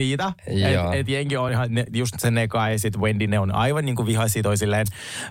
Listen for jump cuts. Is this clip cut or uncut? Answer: uncut